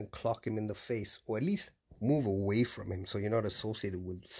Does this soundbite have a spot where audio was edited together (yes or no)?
no